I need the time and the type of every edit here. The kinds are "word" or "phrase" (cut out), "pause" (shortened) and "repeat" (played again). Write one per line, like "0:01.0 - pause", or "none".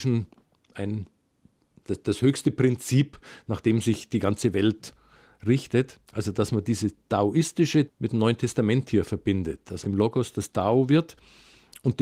0:01.8 - word
0:06.1 - pause
0:07.9 - word
0:09.8 - word